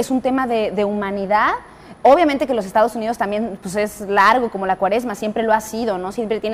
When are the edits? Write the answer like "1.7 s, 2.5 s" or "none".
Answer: none